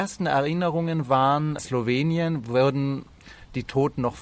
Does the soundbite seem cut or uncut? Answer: cut